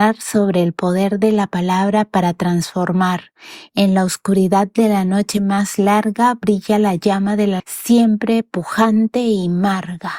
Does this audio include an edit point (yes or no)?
yes